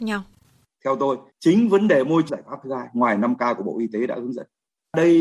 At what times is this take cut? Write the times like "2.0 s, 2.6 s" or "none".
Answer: 2.3 s

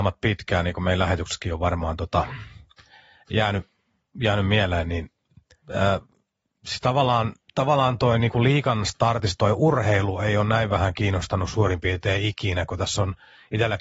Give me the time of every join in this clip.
none

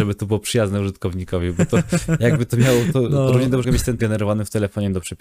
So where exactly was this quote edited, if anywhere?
3.6 s, 4.0 s

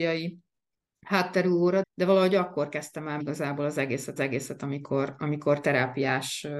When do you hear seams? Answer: 1.8 s, 3.2 s, 4.2 s

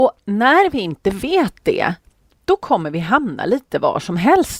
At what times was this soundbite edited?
none

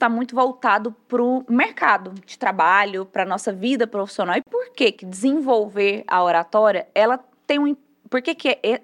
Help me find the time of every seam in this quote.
none

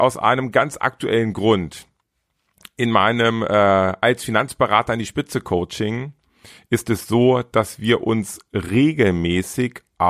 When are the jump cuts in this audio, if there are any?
none

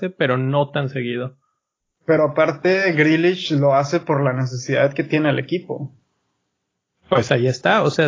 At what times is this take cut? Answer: none

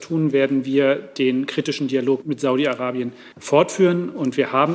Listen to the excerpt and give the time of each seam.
2.2 s, 3.3 s

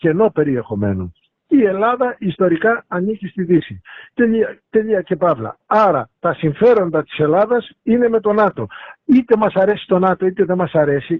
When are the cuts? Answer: none

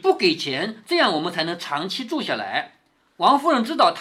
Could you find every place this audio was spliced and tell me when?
none

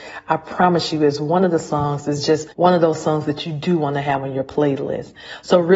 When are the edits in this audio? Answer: 2.5 s

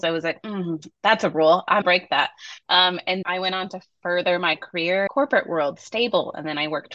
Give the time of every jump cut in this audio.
1.8 s, 3.2 s, 5.1 s, 5.8 s

